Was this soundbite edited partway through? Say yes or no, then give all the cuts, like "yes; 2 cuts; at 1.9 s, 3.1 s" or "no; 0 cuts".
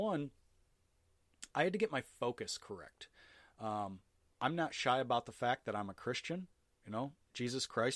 no; 0 cuts